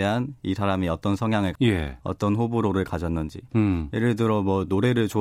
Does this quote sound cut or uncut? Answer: cut